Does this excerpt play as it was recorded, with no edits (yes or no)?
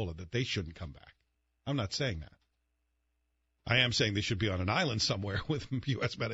yes